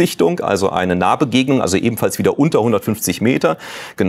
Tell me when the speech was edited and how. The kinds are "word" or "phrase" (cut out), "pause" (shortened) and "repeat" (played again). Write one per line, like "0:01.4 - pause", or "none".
none